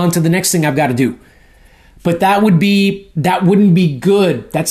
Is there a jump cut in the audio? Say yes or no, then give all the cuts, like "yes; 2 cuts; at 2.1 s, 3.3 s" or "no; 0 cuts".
no; 0 cuts